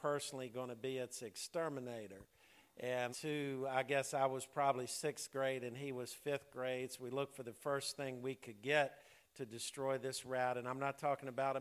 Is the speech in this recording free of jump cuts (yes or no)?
no